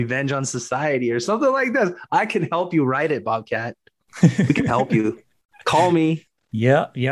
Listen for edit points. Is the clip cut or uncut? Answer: uncut